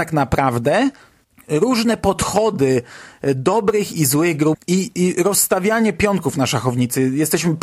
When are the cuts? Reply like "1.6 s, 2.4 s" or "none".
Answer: 4.5 s

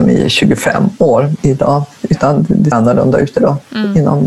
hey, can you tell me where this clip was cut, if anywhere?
2.7 s

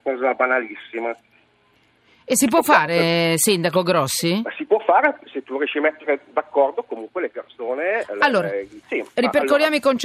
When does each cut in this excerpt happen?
8.8 s

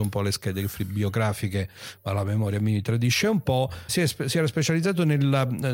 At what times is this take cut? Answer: 3.9 s

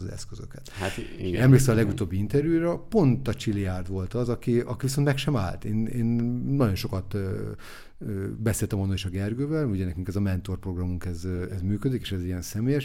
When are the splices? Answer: none

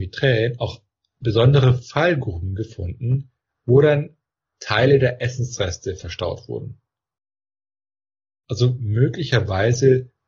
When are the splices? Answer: none

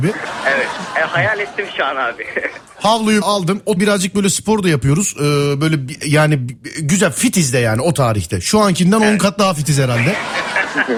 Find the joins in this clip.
3.2 s, 3.8 s

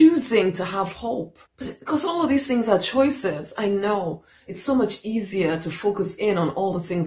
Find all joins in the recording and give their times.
1.5 s

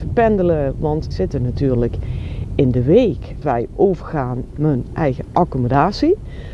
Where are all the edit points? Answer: 1.1 s, 3.4 s, 4.5 s

